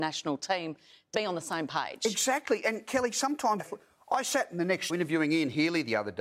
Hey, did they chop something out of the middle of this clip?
yes; 3 cuts; at 1.1 s, 3.6 s, 4.9 s

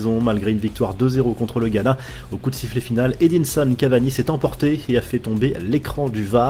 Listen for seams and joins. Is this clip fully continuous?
yes; 0 cuts

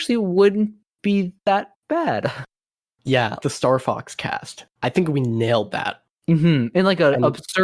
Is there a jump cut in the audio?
yes; 3 cuts; at 1.4 s, 3.4 s, 6.2 s

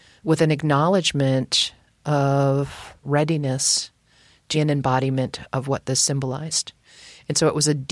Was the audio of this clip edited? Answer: yes; 2 cuts; at 3.0 s, 4.5 s

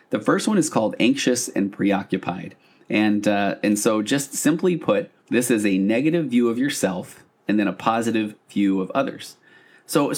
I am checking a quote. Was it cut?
yes; 1 cut; at 5.2 s

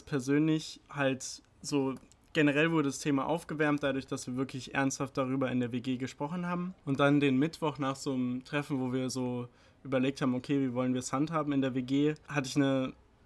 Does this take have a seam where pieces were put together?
no; 0 cuts

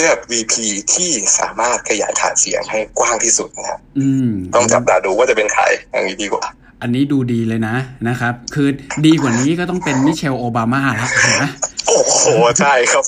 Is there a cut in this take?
no; 0 cuts

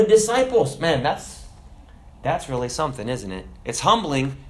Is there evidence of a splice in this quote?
no; 0 cuts

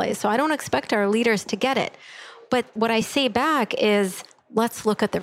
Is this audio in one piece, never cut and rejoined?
yes; 0 cuts

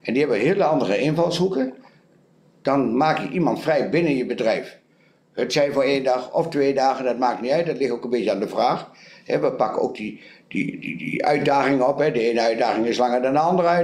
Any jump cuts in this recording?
no; 0 cuts

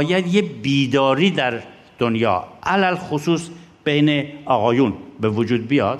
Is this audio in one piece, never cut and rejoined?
yes; 0 cuts

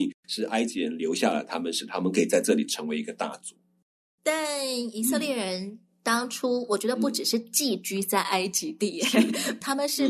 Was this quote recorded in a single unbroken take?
yes; 0 cuts

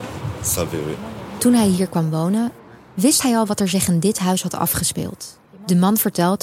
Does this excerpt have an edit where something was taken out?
no; 0 cuts

